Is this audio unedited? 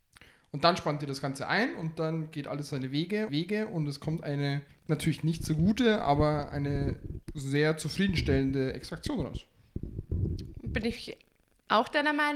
no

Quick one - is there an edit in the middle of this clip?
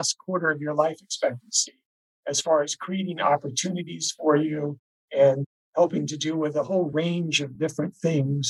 no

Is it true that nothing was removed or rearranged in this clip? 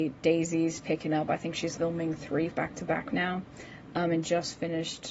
no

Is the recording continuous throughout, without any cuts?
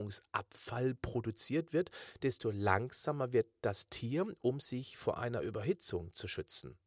yes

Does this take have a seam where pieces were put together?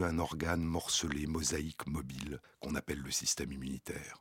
yes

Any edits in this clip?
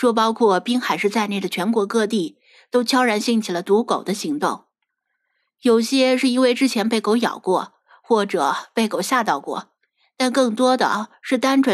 no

